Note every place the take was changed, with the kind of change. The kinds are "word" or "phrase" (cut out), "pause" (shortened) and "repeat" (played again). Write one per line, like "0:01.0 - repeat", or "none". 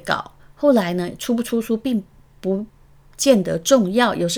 none